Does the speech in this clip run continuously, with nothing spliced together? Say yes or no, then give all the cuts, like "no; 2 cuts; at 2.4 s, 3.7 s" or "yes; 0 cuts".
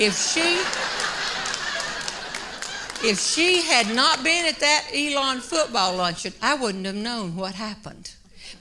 yes; 0 cuts